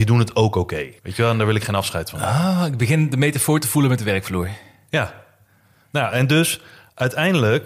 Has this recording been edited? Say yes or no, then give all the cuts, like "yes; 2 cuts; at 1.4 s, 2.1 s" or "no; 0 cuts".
yes; 1 cut; at 1.0 s